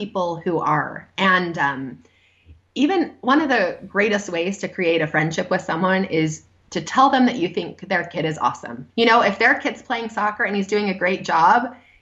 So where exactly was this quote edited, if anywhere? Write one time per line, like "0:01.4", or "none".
0:08.9